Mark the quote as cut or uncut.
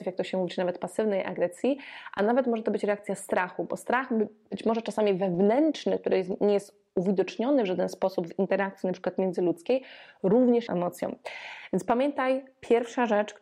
cut